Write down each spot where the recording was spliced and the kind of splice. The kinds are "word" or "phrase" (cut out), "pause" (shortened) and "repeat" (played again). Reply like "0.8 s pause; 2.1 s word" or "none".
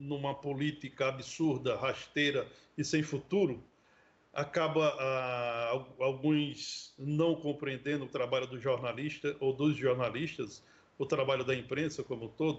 none